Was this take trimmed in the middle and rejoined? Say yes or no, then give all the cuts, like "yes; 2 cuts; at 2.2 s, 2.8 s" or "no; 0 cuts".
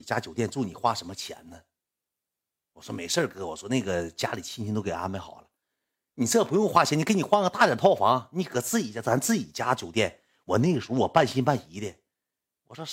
no; 0 cuts